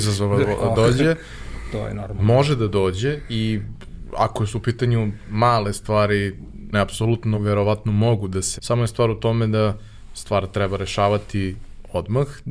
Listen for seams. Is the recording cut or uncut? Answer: cut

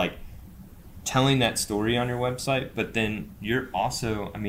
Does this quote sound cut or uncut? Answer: uncut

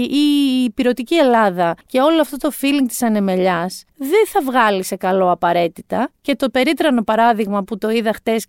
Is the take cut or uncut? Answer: cut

